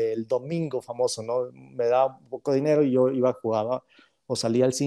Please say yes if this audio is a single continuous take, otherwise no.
yes